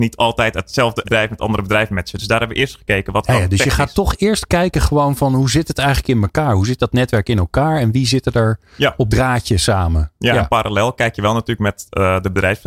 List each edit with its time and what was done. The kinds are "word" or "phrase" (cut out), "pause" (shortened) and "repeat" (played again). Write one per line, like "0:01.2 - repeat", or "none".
0:01.0 - word
0:09.1 - word